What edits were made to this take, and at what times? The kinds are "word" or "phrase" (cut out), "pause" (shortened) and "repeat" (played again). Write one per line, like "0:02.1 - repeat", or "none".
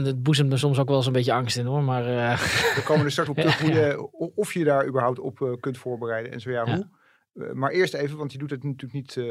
0:03.3 - word